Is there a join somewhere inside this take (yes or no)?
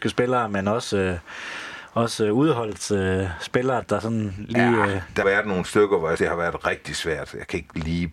yes